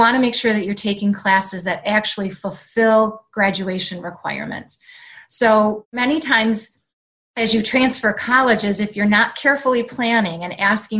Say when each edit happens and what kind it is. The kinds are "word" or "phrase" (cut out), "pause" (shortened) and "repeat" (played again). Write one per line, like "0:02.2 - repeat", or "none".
none